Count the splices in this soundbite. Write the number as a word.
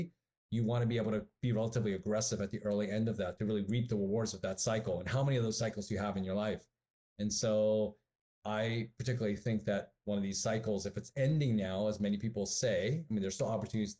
zero